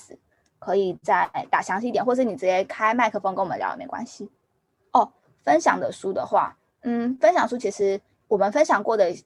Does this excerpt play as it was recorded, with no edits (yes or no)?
yes